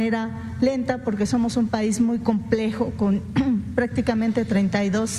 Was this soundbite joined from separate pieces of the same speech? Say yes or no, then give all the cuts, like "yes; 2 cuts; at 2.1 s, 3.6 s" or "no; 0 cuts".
no; 0 cuts